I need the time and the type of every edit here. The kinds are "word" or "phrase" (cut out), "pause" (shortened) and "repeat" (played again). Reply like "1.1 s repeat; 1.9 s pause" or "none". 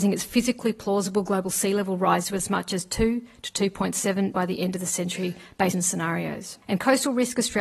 2.2 s word; 4.3 s word; 5.7 s phrase; 6.6 s pause